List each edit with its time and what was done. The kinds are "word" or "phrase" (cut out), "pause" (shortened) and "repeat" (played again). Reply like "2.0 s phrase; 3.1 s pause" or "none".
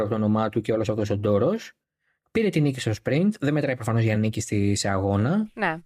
none